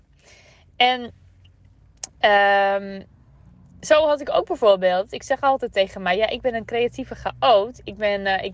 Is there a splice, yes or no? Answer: no